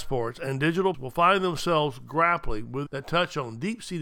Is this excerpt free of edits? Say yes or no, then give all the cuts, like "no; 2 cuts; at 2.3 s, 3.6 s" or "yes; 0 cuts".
no; 2 cuts; at 0.9 s, 2.9 s